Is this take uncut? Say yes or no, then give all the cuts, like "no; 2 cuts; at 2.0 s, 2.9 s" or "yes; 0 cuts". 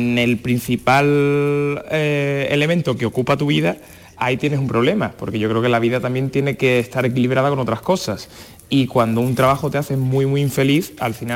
yes; 0 cuts